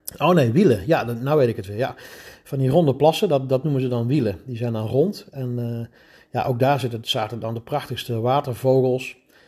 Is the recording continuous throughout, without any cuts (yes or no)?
yes